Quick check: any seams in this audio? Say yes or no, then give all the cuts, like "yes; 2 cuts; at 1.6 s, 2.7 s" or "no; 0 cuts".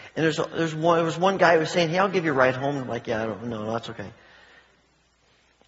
no; 0 cuts